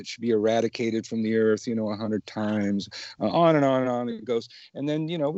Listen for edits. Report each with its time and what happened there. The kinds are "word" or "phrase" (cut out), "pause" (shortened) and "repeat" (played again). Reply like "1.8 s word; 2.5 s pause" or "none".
none